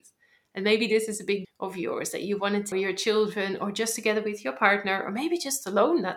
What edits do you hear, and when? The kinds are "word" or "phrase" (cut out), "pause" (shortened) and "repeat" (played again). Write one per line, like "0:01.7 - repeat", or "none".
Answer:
0:01.4 - word
0:02.7 - phrase